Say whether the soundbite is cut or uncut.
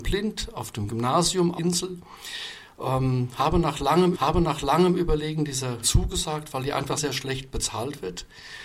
cut